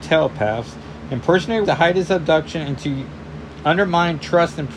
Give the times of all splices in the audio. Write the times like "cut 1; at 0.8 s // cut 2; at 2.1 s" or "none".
cut 1; at 1.6 s